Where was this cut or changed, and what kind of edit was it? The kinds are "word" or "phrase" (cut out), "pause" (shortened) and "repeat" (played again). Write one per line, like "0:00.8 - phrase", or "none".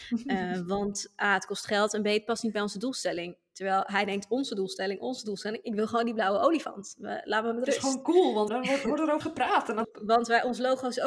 0:08.5 - word
0:09.2 - word
0:09.8 - word